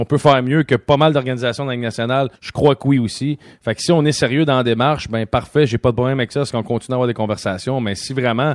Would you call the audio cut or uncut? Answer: cut